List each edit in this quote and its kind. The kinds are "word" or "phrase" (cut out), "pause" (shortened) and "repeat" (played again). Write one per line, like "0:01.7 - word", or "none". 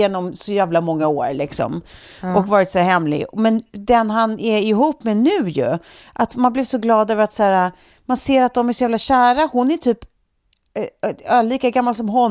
none